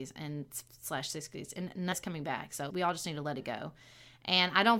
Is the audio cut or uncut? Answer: cut